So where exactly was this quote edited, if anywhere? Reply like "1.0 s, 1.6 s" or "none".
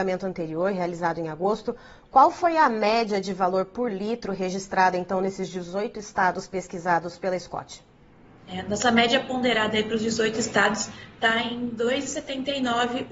none